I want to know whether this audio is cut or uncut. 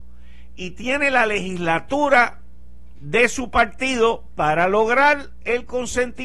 uncut